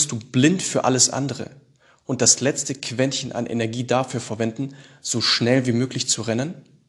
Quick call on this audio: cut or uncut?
uncut